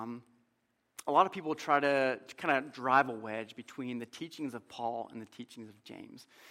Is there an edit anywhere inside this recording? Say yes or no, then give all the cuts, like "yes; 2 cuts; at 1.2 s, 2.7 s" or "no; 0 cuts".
no; 0 cuts